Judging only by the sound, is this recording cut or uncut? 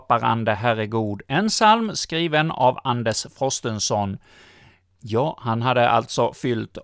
uncut